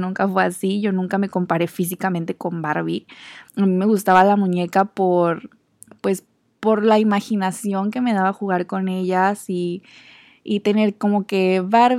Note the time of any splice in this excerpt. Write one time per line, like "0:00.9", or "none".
0:03.5

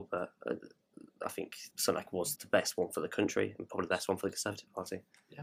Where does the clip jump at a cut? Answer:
0:01.7
0:02.4

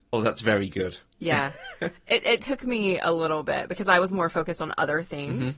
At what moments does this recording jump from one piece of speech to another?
0:01.1

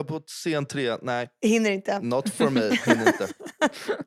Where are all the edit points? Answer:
none

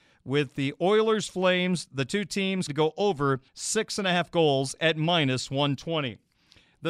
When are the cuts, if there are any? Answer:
0:02.7
0:03.5

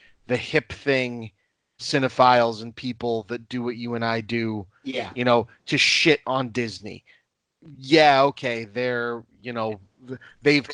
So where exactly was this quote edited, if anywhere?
0:01.8

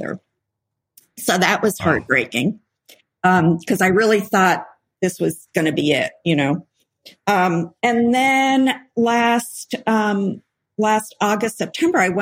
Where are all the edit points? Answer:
0:07.8
0:10.6

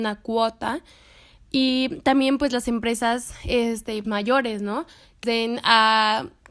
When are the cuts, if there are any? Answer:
0:04.0
0:05.2

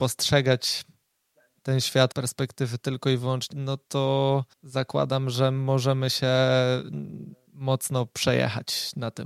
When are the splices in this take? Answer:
0:02.1
0:03.5
0:04.5

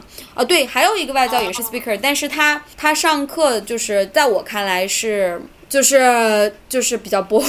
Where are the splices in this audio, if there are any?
0:01.6

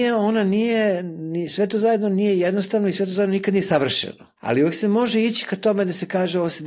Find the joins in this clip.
0:04.4

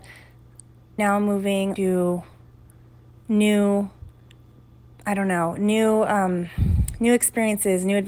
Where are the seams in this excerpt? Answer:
0:01.0
0:01.8
0:04.6

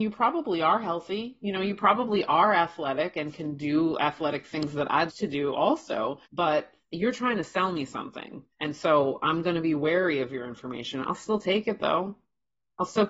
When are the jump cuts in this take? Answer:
0:05.1
0:06.2
0:08.5

